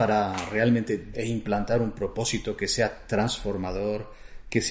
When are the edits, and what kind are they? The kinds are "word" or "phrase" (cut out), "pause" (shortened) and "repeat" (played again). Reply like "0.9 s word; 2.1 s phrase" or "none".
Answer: 1.1 s word

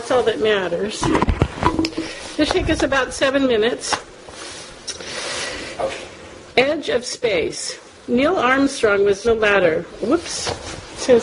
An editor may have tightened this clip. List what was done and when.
2.5 s word; 7.9 s pause; 9.2 s word

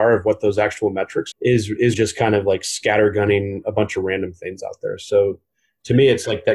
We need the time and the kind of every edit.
1.3 s word; 1.9 s word

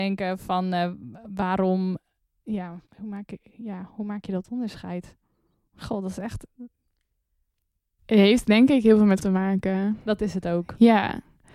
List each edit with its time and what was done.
2.9 s pause; 9.2 s word

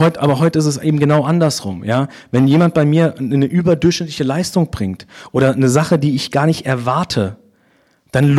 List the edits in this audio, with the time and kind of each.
none

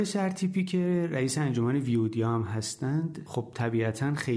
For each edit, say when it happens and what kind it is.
none

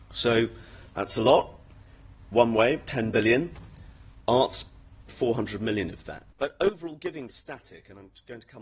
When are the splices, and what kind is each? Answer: 2.3 s word; 5.1 s word; 6.3 s pause; 7.3 s word

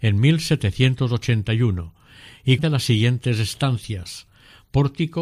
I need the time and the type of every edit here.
2.6 s word

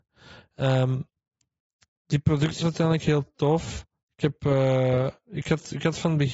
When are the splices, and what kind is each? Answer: 2.6 s word; 5.2 s pause

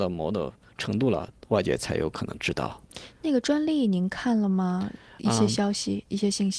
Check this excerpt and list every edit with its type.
none

